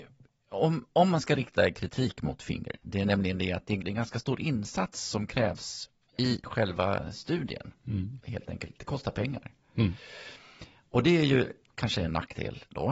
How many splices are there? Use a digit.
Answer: 0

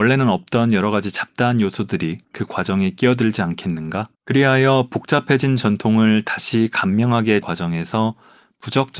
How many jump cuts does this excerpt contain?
3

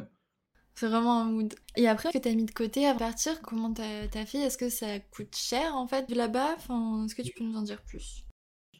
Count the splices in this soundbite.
4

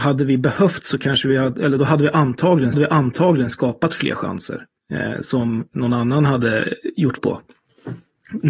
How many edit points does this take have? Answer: 4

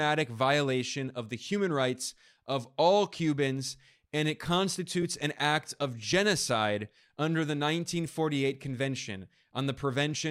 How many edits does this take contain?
0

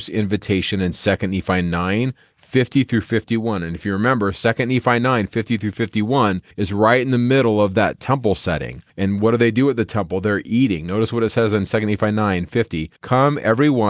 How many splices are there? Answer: 3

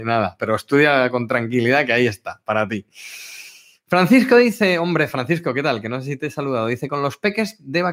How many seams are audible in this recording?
0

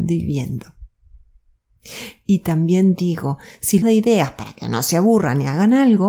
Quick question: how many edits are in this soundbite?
1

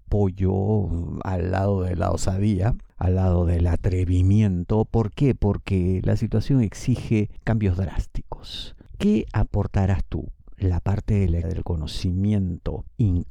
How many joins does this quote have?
1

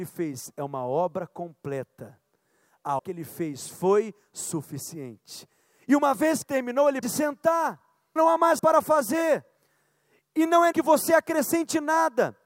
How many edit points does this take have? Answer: 6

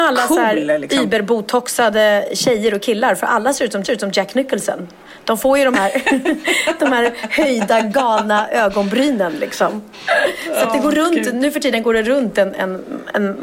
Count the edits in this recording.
1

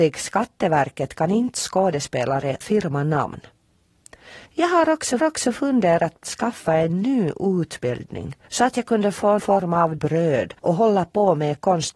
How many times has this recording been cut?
8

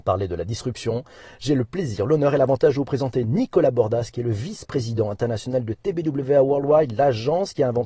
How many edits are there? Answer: 0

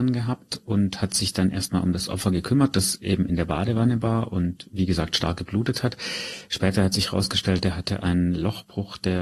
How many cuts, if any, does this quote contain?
0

